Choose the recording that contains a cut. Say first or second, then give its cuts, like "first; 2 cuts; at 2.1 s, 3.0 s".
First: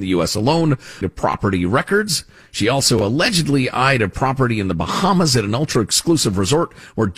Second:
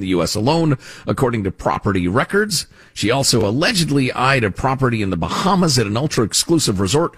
first; 1 cut; at 1.0 s